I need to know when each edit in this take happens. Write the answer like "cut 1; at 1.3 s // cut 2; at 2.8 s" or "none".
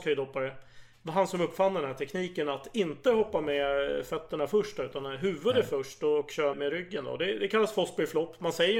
cut 1; at 6.5 s